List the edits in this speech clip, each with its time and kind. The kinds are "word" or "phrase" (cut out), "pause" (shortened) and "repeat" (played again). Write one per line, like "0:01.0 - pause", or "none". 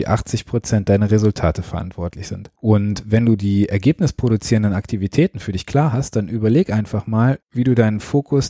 0:02.5 - pause
0:07.4 - pause